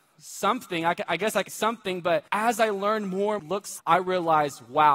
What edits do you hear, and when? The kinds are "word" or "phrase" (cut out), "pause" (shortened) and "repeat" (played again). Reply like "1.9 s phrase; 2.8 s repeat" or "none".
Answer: 1.5 s word; 2.3 s pause; 3.4 s phrase; 3.8 s word